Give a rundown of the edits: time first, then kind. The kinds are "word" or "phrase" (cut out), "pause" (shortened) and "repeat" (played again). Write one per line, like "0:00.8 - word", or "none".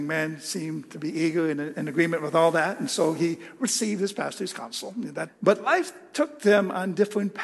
0:05.3 - phrase